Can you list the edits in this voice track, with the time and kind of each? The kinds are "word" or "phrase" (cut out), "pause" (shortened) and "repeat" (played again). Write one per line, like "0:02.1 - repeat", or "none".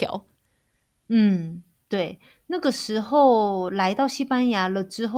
none